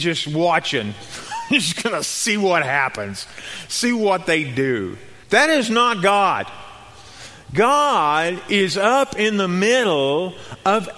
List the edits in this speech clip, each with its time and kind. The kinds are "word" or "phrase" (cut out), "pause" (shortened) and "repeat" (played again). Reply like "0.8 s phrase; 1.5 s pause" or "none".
5.2 s pause